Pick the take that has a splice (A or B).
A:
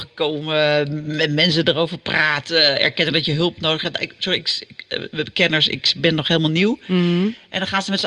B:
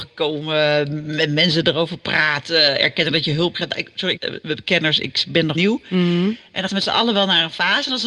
B